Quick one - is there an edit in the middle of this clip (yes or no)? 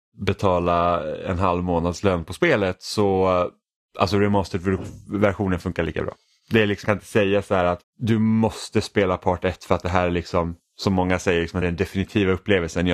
yes